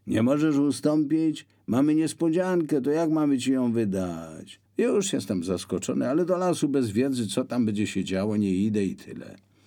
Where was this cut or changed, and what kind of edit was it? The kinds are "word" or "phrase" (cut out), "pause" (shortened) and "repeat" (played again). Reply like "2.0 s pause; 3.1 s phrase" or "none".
4.7 s pause